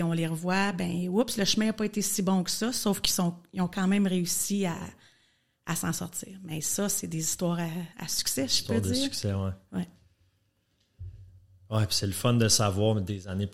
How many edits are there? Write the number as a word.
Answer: one